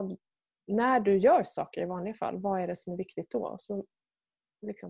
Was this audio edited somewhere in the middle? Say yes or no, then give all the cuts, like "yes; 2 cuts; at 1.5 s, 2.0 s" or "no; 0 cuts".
no; 0 cuts